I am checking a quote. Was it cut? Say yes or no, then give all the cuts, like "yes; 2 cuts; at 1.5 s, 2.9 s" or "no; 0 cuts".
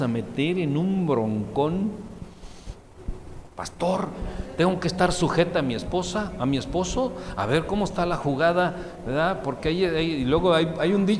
no; 0 cuts